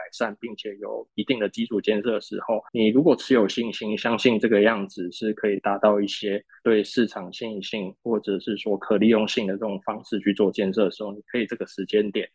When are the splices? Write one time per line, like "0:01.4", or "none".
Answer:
0:02.7

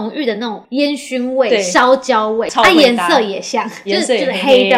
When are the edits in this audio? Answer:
0:03.9

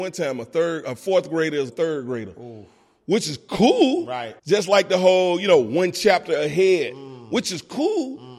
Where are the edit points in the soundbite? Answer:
0:01.7
0:04.4

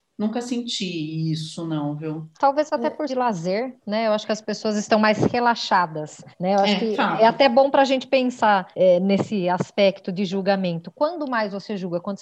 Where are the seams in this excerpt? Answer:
0:02.3
0:03.1
0:06.3
0:08.7

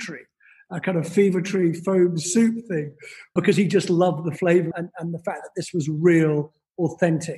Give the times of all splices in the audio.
0:03.4
0:04.7

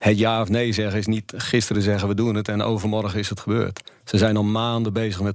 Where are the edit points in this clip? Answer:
none

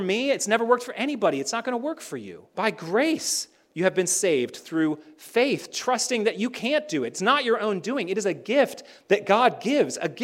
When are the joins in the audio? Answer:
0:02.5

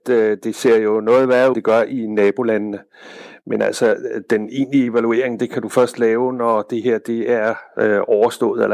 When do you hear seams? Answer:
0:01.5

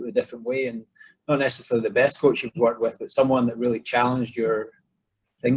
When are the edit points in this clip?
none

